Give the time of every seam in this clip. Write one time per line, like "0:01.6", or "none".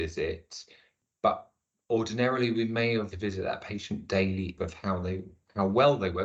0:03.1
0:04.6